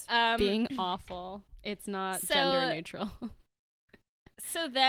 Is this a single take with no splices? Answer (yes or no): yes